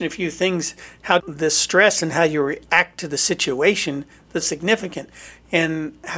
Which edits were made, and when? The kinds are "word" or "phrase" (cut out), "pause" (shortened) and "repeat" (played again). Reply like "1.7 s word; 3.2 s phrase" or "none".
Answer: 1.2 s word; 4.4 s word